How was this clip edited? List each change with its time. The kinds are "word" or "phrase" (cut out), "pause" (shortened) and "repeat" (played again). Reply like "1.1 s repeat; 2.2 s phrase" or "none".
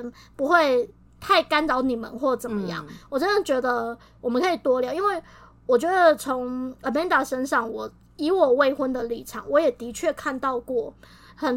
none